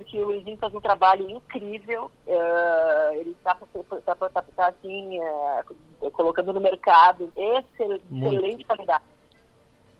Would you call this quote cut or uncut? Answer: cut